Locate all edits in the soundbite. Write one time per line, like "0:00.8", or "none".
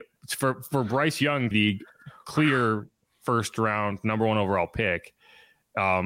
0:01.5